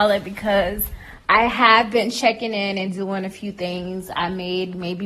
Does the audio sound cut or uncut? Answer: uncut